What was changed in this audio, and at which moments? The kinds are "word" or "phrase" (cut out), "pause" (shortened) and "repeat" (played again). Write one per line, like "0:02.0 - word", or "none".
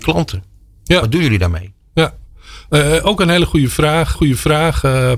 0:04.1 - repeat